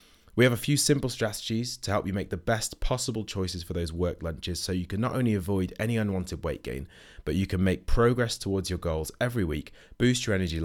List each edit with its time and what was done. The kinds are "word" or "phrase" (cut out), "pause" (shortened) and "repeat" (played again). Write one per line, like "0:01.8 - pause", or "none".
none